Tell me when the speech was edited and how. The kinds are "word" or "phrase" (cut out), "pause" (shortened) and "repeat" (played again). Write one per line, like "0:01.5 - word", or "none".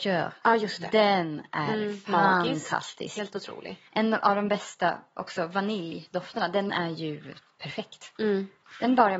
0:03.9 - pause
0:06.7 - word